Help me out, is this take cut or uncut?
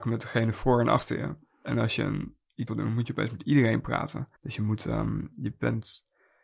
cut